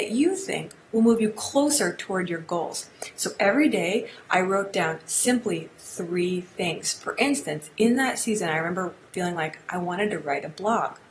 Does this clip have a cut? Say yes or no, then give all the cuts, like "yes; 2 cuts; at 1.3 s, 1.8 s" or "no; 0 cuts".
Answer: no; 0 cuts